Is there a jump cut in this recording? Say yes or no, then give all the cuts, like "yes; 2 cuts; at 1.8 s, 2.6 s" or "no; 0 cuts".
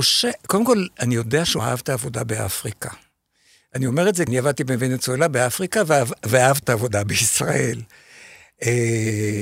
yes; 3 cuts; at 1.6 s, 4.3 s, 6.6 s